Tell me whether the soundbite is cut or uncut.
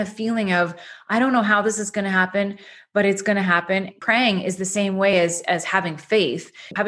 uncut